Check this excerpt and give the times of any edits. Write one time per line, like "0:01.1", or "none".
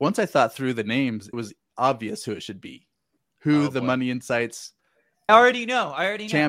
0:01.3
0:03.2
0:05.3